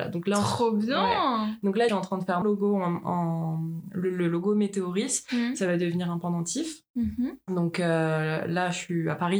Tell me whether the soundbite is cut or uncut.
cut